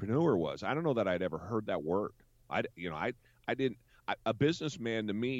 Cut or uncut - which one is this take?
uncut